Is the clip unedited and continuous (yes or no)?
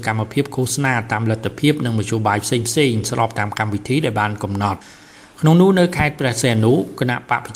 yes